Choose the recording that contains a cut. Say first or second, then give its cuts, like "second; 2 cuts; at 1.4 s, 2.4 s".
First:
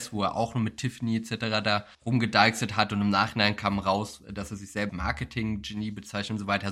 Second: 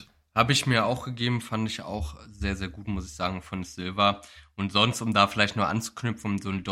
first; 2 cuts; at 1.9 s, 4.9 s